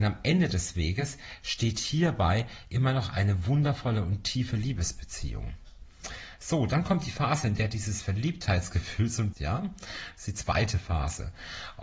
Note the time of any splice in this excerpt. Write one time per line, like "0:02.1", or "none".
0:09.3